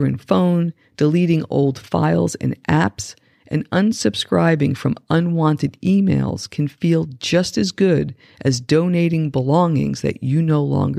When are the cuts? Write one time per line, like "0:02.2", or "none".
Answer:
none